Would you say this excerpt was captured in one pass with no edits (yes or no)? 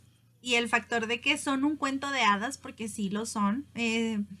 yes